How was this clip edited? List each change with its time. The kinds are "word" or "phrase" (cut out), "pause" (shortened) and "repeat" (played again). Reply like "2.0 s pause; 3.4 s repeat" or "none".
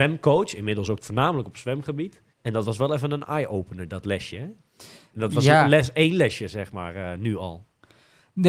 1.0 s phrase; 2.3 s pause